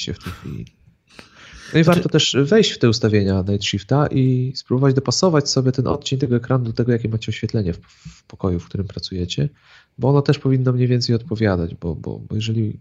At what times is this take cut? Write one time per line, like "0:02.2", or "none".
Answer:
none